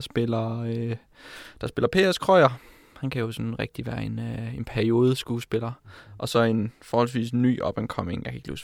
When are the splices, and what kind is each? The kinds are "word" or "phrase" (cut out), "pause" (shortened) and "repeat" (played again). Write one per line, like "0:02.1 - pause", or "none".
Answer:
none